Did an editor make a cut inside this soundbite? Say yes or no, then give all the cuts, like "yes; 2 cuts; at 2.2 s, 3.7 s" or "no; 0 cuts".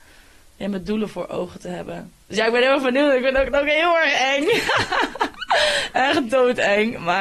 yes; 1 cut; at 2.2 s